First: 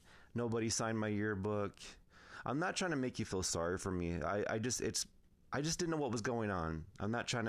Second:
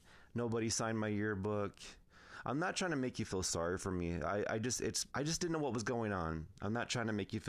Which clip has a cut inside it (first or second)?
second